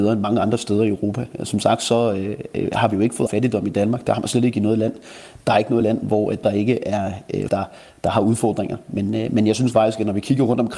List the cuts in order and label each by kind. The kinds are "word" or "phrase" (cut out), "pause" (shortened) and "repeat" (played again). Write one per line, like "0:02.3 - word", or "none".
0:03.3 - word
0:06.4 - phrase
0:07.5 - word